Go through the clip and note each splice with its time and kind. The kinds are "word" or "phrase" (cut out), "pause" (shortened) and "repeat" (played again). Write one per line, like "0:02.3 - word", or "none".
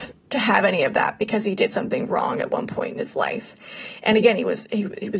none